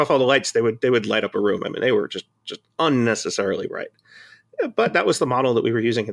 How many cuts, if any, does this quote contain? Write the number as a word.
zero